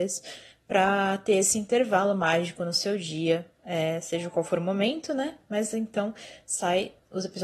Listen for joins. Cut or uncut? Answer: uncut